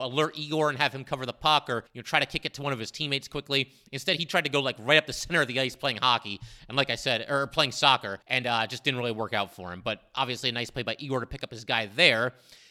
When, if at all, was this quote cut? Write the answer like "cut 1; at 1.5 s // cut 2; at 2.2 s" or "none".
cut 1; at 1.9 s // cut 2; at 8.2 s